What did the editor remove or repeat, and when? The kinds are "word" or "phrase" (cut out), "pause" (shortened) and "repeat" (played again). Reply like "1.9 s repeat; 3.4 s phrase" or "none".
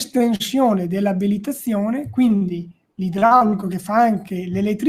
none